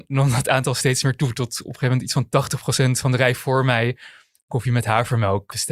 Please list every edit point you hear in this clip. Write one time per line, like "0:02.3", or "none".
none

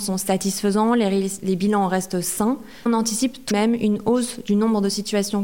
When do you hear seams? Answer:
0:02.9
0:03.5

